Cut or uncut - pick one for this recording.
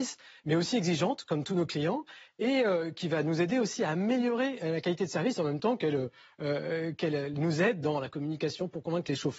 uncut